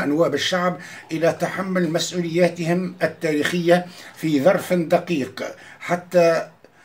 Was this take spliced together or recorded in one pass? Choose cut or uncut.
uncut